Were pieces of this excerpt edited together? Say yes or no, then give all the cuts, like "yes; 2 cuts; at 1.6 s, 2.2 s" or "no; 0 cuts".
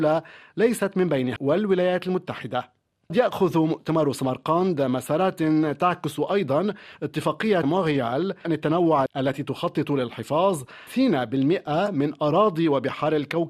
yes; 6 cuts; at 1.4 s, 3.1 s, 7.6 s, 8.4 s, 9.1 s, 10.9 s